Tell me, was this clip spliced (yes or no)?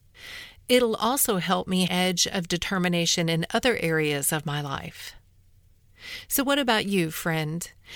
yes